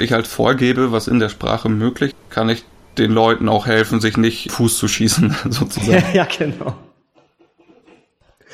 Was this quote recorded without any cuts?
no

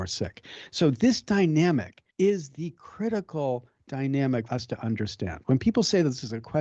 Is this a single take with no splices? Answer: no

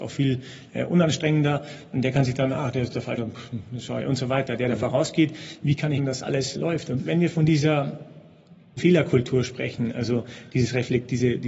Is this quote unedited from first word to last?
no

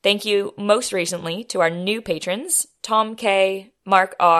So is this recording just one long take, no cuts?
yes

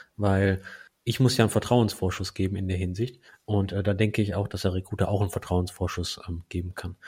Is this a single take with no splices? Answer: yes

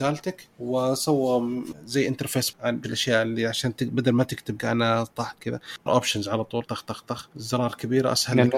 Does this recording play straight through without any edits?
no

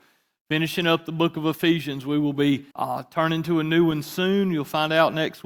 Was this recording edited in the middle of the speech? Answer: yes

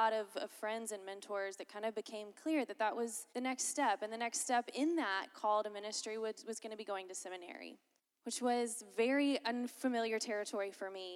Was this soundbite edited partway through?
yes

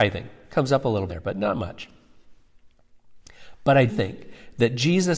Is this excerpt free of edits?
no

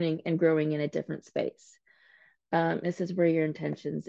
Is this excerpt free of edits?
no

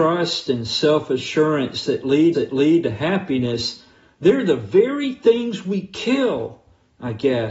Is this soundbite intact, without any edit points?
no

